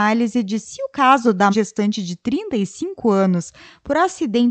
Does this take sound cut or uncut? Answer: cut